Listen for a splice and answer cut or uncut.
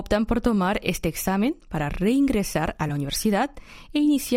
uncut